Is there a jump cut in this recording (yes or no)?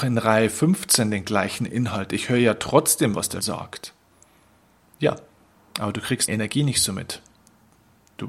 yes